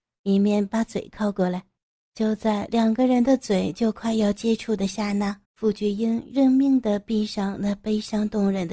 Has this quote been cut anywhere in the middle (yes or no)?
yes